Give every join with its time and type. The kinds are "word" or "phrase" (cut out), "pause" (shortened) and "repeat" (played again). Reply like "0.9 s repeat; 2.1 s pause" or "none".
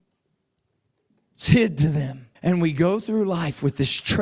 2.4 s pause